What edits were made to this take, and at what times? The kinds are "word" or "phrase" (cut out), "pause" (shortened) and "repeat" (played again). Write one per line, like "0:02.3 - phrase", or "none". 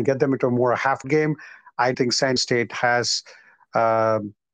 0:01.0 - word
0:01.9 - word
0:02.4 - word